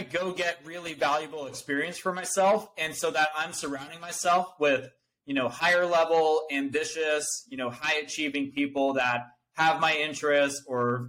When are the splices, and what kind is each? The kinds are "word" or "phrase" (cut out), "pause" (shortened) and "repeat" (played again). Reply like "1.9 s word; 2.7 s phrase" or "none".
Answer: none